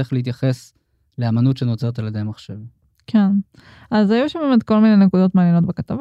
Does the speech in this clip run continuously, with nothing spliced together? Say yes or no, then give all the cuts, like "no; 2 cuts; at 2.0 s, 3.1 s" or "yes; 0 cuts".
yes; 0 cuts